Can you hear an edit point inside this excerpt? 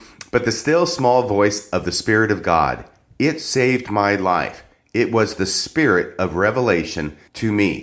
no; 0 cuts

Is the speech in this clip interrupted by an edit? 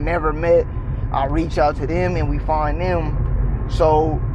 no; 0 cuts

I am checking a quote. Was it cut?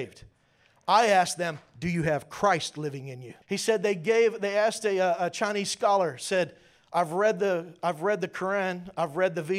yes; 1 cut; at 3.4 s

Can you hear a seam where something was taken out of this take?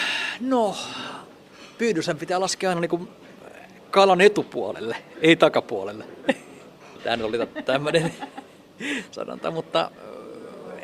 no; 0 cuts

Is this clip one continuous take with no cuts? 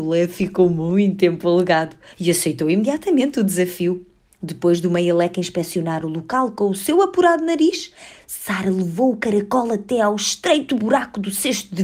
yes; 0 cuts

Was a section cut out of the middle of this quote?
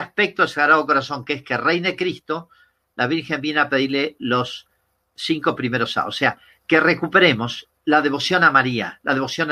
no; 0 cuts

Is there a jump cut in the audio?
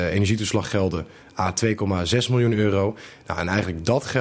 no; 0 cuts

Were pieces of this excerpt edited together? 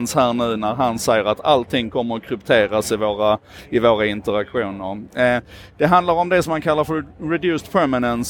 no; 0 cuts

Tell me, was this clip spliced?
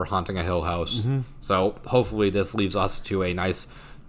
no; 0 cuts

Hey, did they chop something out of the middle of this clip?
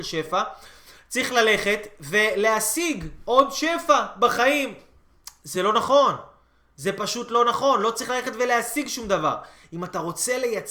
no; 0 cuts

